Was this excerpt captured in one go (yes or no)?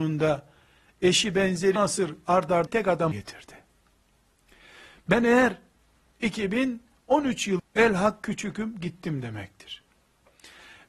no